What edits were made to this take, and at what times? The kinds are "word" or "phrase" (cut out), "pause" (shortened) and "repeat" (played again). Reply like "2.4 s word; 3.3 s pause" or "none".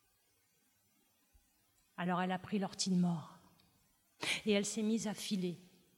none